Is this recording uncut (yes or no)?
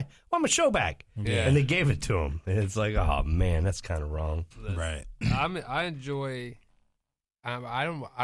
no